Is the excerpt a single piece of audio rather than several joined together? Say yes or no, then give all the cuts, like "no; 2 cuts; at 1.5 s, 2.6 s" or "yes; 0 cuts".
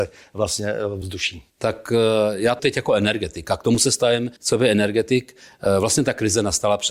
no; 4 cuts; at 1.0 s, 1.5 s, 2.6 s, 4.4 s